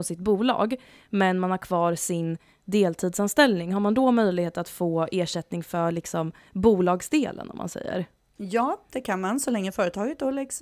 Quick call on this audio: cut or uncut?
uncut